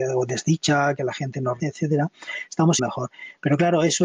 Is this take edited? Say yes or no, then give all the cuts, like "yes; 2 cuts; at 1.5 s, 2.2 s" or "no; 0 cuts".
yes; 2 cuts; at 1.6 s, 2.8 s